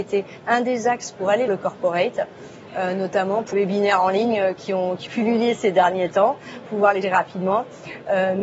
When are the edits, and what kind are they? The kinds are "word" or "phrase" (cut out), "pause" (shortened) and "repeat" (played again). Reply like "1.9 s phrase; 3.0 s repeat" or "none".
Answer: 1.5 s word; 3.5 s word; 5.1 s word; 7.0 s word